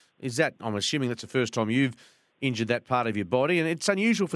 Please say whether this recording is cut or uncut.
uncut